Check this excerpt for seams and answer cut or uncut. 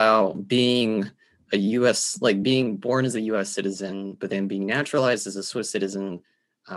uncut